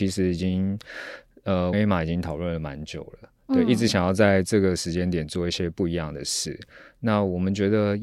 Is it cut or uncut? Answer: cut